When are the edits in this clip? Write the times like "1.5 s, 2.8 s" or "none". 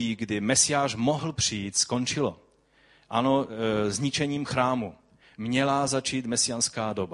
none